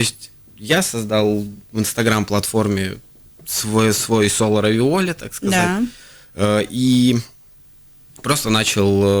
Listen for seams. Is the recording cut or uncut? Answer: uncut